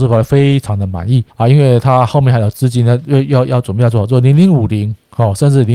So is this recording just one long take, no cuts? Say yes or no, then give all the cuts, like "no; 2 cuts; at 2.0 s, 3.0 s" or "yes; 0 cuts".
no; 1 cut; at 1.3 s